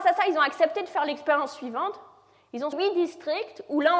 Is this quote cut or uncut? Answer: cut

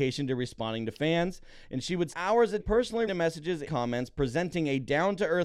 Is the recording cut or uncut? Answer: cut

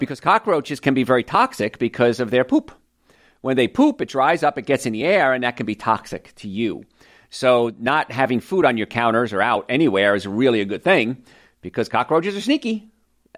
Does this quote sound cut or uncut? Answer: uncut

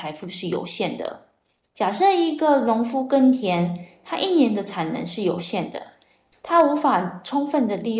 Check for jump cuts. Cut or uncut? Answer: uncut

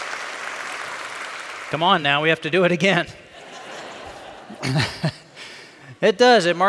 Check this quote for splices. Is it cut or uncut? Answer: uncut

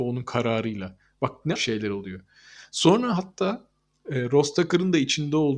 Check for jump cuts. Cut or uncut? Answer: cut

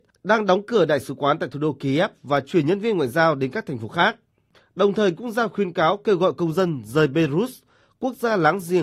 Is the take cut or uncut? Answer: uncut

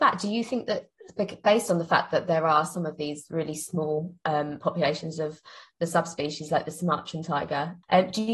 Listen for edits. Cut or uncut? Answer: uncut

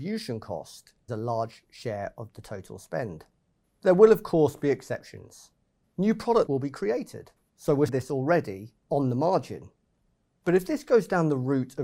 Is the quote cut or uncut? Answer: cut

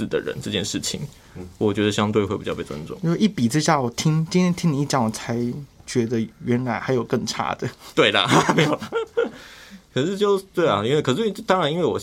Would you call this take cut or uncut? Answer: uncut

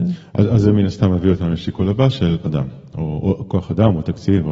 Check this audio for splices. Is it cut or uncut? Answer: cut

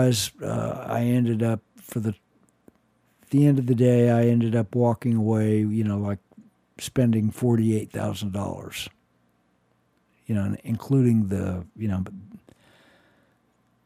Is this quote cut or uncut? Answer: uncut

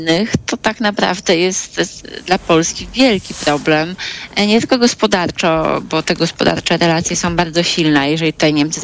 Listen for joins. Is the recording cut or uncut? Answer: uncut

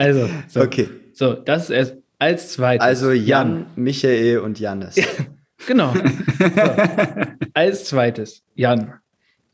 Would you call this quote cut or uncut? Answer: uncut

